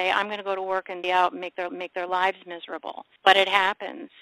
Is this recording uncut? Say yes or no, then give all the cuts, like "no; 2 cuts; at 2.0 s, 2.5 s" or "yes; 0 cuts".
no; 2 cuts; at 1.0 s, 1.7 s